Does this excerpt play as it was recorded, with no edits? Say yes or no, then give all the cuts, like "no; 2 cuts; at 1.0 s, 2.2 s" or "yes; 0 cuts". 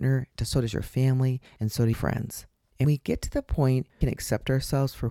no; 3 cuts; at 1.9 s, 2.8 s, 4.0 s